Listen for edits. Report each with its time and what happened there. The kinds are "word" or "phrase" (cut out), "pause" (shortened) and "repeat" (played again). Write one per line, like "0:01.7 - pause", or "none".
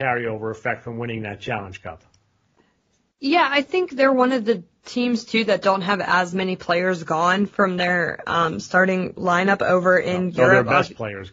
none